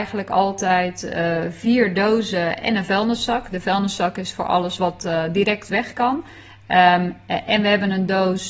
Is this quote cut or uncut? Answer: uncut